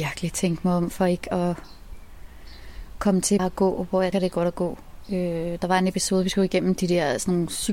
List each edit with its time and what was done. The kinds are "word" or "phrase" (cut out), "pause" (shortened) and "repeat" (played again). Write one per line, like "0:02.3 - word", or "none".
0:03.4 - word
0:04.1 - word